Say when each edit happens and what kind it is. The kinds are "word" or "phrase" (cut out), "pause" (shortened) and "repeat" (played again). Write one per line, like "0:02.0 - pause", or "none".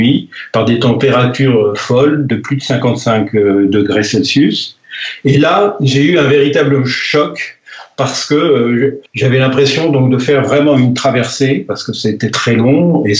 0:09.1 - pause